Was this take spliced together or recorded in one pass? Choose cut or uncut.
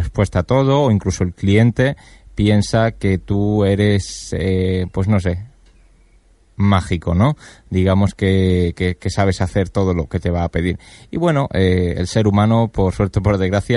uncut